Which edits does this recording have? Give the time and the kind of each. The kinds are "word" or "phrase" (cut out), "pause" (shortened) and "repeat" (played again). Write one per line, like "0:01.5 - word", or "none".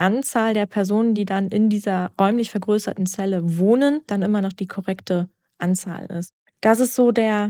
none